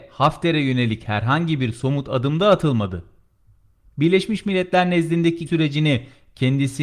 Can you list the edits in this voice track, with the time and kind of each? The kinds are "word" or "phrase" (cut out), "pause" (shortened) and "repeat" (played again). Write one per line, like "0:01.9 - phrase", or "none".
0:05.5 - word